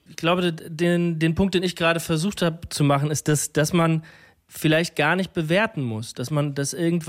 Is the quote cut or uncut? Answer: uncut